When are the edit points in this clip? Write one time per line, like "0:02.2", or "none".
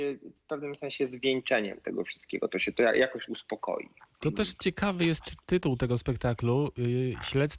0:03.3